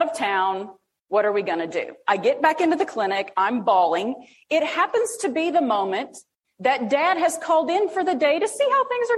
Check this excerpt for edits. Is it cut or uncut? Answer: uncut